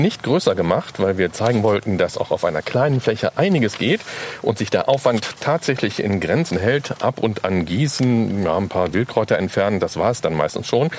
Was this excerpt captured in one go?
yes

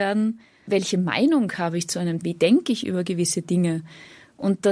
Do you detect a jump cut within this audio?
yes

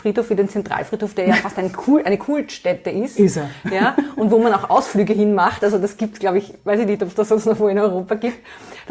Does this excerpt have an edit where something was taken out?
no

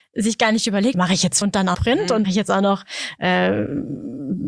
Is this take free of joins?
no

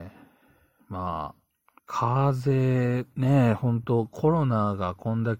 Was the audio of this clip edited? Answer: yes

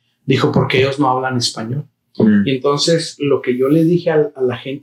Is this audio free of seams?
yes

